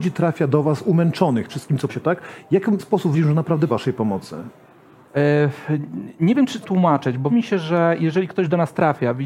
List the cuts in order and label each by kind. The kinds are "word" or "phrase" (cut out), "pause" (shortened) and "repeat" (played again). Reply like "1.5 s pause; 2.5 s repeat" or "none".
1.5 s word; 1.9 s word; 2.8 s word; 3.1 s word; 3.7 s word; 6.6 s word; 7.3 s word